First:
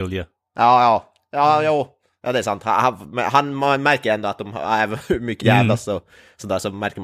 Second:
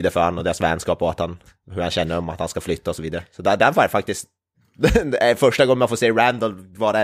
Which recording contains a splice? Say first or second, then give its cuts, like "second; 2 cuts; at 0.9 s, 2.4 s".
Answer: first; 1 cut; at 5.4 s